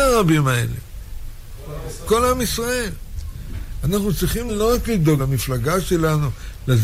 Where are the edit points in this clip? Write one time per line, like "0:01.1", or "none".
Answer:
0:02.1
0:04.5
0:05.2